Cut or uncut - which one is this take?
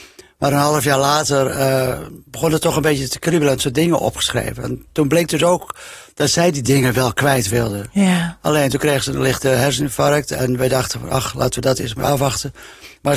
cut